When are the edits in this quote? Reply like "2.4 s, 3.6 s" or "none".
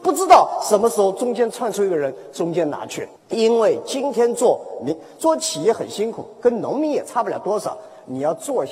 3.2 s